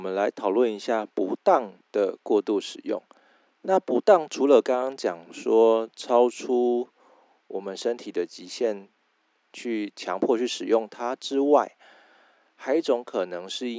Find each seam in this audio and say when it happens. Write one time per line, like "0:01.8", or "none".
none